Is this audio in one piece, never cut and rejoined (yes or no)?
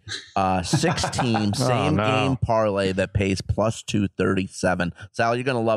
yes